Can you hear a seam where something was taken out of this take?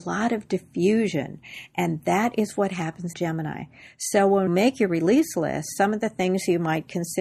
yes; 2 cuts; at 3.1 s, 4.5 s

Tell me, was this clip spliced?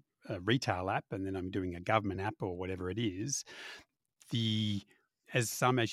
no; 0 cuts

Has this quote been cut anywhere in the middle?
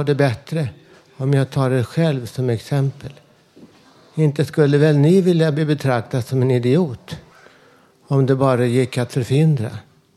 no; 0 cuts

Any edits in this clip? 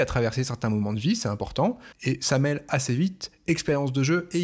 yes; 1 cut; at 1.9 s

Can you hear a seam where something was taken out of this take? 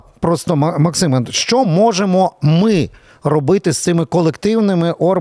no; 0 cuts

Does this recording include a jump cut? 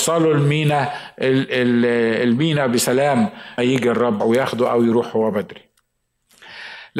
yes; 2 cuts; at 3.6 s, 4.2 s

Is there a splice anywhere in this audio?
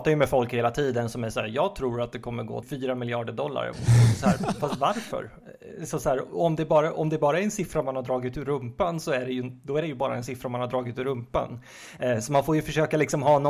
yes; 1 cut; at 2.6 s

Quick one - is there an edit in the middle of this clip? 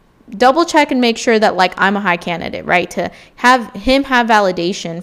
no; 0 cuts

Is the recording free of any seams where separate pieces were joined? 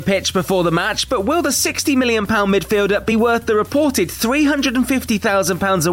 yes; 0 cuts

